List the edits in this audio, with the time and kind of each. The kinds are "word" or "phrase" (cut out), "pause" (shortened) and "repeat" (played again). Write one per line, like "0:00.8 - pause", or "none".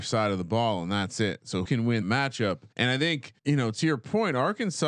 0:01.6 - word
0:02.0 - word
0:02.7 - pause
0:03.4 - pause

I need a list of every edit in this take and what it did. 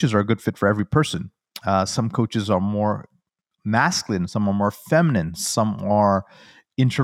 none

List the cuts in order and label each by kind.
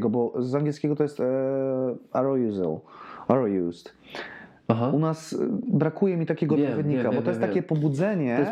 none

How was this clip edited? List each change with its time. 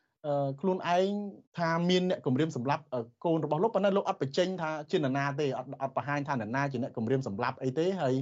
0:01.5 - pause

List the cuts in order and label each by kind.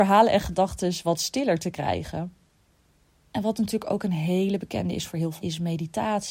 0:05.4 - word

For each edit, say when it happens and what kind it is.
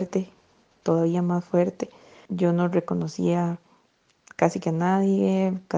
none

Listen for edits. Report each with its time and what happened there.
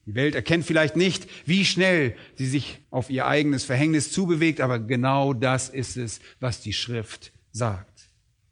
0:02.8 - pause

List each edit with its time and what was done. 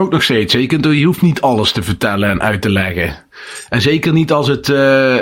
none

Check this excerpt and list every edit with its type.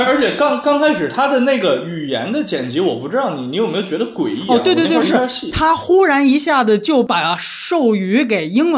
0:05.0 - word

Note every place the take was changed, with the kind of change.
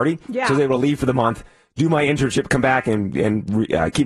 none

